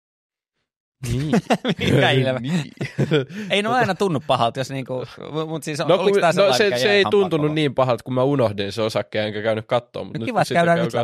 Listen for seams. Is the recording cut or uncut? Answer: uncut